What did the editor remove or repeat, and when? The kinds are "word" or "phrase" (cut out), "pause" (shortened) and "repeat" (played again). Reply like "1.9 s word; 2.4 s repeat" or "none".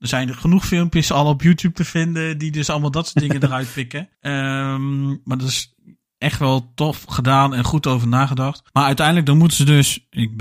4.1 s pause; 8.7 s pause